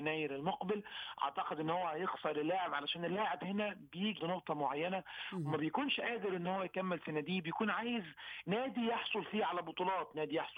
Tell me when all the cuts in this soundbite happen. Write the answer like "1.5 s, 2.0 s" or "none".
4.2 s